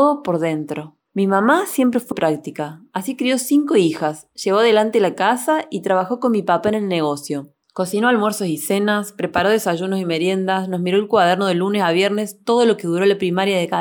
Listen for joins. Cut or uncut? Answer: cut